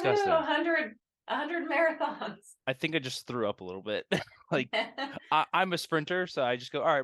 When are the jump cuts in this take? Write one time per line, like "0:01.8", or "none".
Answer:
none